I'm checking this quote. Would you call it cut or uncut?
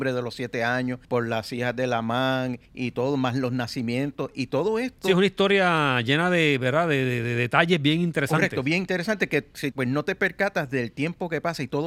cut